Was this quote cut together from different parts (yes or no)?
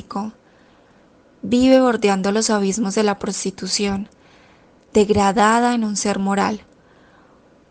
no